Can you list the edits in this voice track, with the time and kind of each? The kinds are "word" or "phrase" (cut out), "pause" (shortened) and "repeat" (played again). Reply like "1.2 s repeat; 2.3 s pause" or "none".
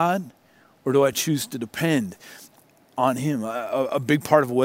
none